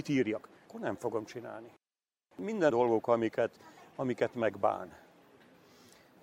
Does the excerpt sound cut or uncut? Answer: cut